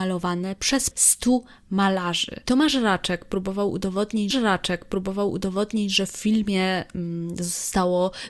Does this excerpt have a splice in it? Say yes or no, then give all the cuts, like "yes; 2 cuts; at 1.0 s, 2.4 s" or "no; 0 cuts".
yes; 2 cuts; at 0.9 s, 4.3 s